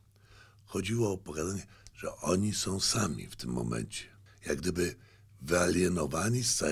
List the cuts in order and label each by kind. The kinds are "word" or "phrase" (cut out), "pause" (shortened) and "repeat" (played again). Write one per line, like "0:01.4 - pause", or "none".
0:04.3 - pause